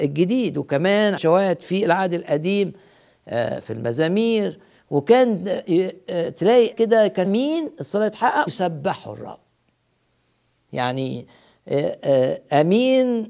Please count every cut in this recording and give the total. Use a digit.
4